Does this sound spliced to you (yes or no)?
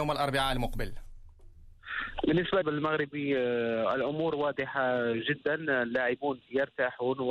yes